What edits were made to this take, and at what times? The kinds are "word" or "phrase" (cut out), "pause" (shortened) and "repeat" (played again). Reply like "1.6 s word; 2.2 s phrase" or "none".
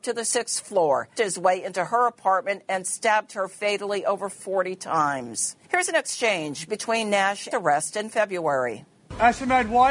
1.1 s word; 5.6 s pause; 7.5 s phrase